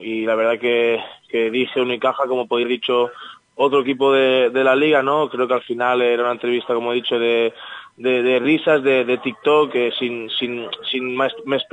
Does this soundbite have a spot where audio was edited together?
yes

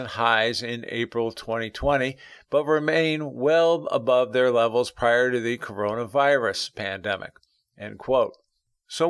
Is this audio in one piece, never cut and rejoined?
yes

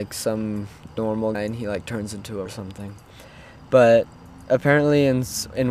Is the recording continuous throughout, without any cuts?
no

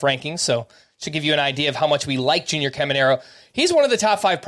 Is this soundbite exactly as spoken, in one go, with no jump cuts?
yes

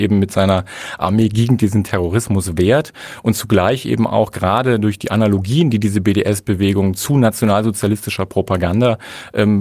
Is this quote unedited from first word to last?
yes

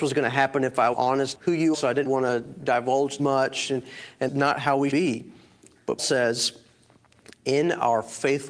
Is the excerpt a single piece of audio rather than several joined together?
no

